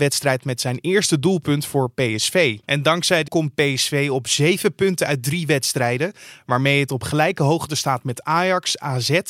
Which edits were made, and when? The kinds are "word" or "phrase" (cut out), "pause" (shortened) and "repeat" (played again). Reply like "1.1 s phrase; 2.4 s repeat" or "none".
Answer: 2.6 s pause; 3.3 s phrase

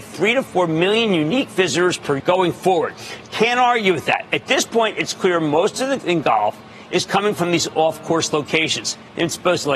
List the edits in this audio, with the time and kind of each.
2.2 s word; 6.0 s word

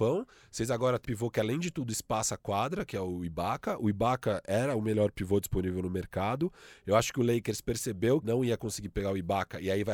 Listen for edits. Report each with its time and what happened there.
1.0 s word; 8.2 s word

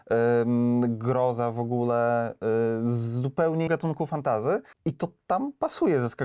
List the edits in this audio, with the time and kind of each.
3.7 s word; 4.7 s pause

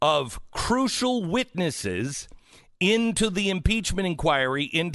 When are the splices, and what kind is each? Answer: none

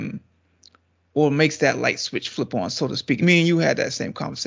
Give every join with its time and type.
3.2 s word

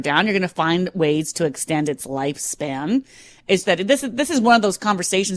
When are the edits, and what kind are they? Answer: 3.6 s word

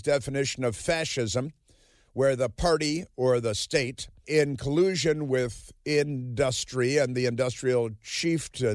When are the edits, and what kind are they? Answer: 4.2 s word

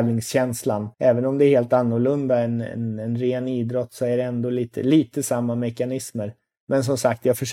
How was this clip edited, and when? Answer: 0.9 s pause

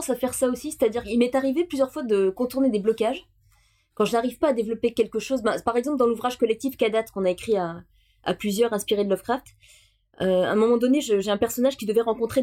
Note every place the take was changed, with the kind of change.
none

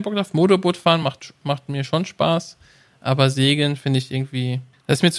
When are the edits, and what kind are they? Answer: none

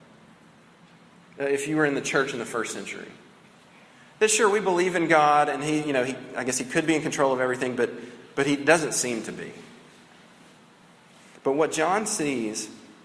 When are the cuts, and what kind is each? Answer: none

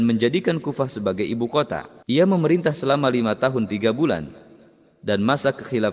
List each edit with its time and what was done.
2.0 s pause

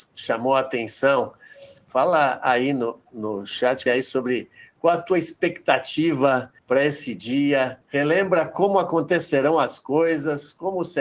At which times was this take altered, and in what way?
3.9 s word; 6.6 s pause; 7.8 s pause

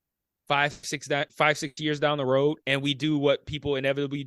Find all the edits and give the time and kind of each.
2.6 s pause

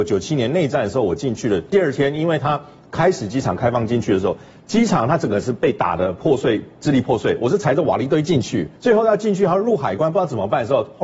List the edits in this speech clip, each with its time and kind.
8.8 s pause

